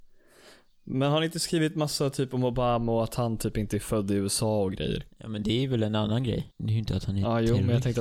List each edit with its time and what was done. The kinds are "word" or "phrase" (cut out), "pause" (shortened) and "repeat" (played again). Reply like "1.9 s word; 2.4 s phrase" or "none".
6.5 s pause